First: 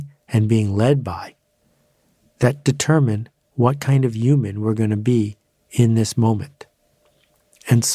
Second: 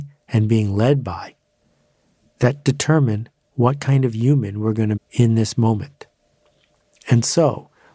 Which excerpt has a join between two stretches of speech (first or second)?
second